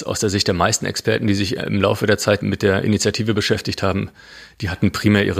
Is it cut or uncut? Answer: uncut